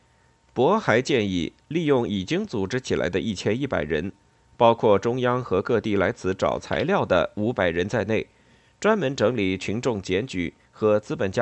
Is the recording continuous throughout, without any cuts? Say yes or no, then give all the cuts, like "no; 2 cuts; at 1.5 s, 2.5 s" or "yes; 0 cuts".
yes; 0 cuts